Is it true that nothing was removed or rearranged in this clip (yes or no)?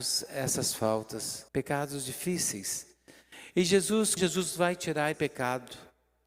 no